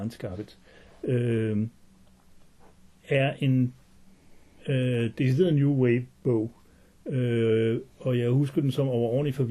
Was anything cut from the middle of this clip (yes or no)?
no